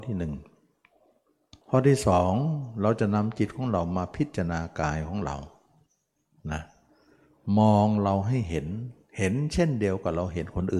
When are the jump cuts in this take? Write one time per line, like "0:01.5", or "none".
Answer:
0:01.6
0:05.9